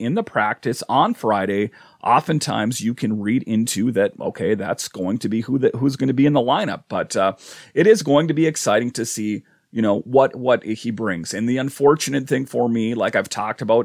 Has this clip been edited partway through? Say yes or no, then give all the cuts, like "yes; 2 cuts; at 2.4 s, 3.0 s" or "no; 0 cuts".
no; 0 cuts